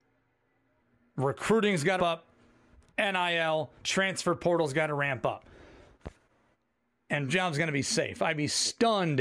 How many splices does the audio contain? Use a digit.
3